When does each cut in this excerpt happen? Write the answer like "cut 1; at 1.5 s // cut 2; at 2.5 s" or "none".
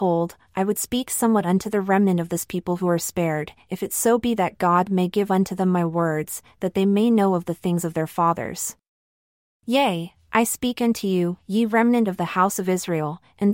none

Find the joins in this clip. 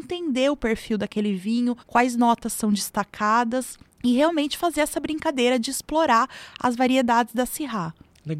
cut 1; at 1.8 s // cut 2; at 3.9 s

